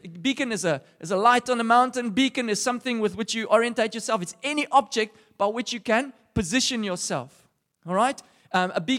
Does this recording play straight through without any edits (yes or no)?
yes